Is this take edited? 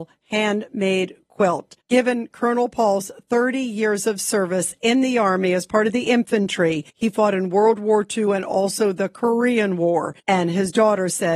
yes; 3 cuts; at 1.8 s, 6.9 s, 10.2 s

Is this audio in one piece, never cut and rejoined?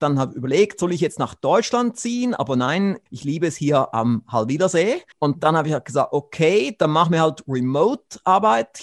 no; 2 cuts; at 3.1 s, 5.1 s

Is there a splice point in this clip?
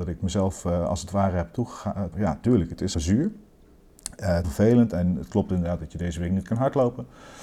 yes; 3 cuts; at 2.1 s, 2.9 s, 4.4 s

